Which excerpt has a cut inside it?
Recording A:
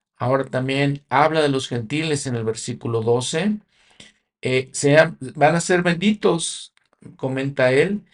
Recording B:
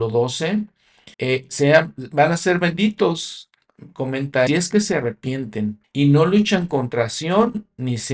B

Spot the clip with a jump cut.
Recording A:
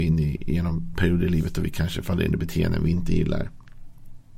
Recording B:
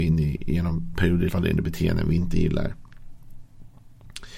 B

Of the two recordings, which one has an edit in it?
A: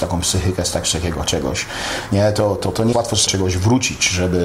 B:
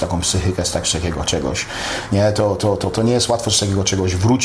A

